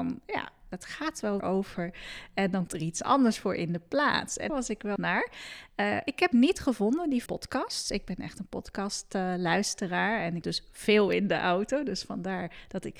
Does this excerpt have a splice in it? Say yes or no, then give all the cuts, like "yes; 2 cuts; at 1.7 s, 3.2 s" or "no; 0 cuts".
yes; 7 cuts; at 1.4 s, 2.7 s, 4.5 s, 5.0 s, 6.3 s, 7.3 s, 10.4 s